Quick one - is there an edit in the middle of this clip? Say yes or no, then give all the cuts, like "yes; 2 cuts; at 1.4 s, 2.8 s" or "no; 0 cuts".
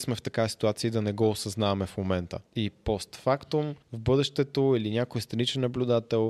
yes; 2 cuts; at 2.5 s, 3.8 s